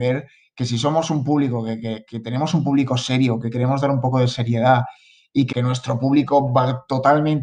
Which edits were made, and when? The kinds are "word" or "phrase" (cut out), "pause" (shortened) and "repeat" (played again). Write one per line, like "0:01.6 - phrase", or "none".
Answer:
0:05.5 - word